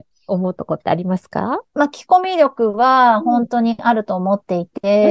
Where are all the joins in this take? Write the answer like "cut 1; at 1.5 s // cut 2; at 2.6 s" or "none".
cut 1; at 1.7 s